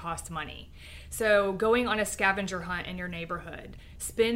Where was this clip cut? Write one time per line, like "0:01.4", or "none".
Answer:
none